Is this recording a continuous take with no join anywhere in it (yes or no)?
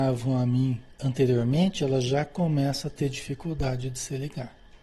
yes